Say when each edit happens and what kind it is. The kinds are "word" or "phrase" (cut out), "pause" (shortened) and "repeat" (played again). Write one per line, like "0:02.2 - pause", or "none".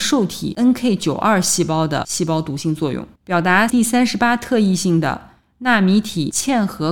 0:03.2 - pause
0:03.7 - word